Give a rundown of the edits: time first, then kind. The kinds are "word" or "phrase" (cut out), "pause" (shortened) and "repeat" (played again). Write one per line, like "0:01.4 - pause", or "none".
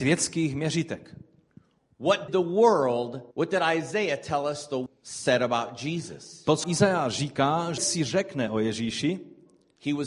0:02.3 - word
0:03.3 - pause
0:04.9 - word
0:06.6 - word
0:07.8 - word